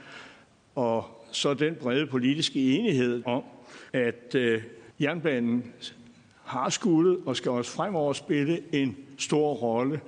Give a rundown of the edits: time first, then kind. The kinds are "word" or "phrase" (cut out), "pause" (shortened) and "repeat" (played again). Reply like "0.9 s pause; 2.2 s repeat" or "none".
3.2 s phrase; 3.9 s pause; 4.9 s pause